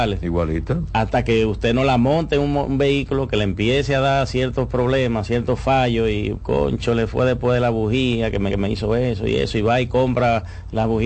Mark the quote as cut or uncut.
cut